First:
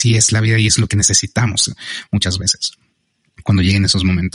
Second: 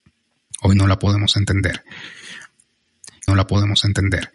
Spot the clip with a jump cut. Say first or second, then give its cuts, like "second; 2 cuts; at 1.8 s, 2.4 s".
second; 1 cut; at 3.3 s